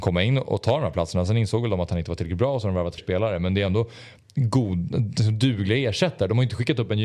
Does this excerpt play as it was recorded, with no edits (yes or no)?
no